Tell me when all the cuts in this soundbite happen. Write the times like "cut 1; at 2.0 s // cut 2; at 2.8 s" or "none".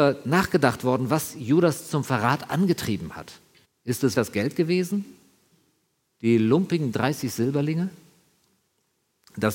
cut 1; at 3.6 s // cut 2; at 4.1 s